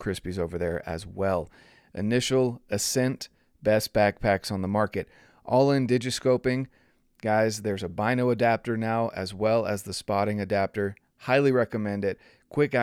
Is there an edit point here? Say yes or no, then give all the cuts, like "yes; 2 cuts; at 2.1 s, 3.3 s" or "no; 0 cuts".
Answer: no; 0 cuts